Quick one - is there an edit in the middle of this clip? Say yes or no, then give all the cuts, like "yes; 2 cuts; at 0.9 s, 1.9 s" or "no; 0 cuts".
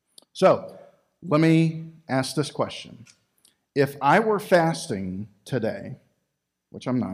no; 0 cuts